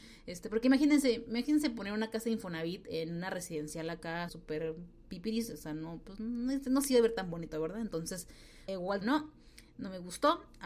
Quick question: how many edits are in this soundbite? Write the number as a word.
three